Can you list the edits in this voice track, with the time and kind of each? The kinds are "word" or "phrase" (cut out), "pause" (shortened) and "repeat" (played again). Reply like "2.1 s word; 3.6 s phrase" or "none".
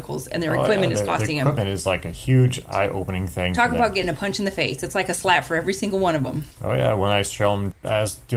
none